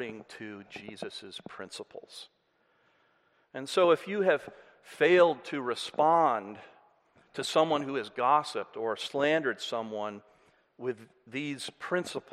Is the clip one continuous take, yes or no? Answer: yes